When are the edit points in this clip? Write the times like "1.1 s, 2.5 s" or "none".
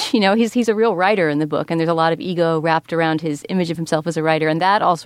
none